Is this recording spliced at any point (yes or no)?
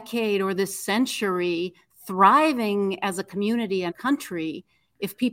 yes